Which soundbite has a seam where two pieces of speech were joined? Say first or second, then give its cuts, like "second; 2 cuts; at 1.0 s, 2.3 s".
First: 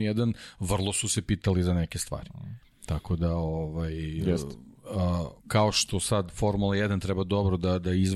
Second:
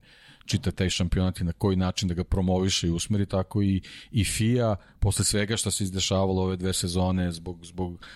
first; 2 cuts; at 2.6 s, 5.4 s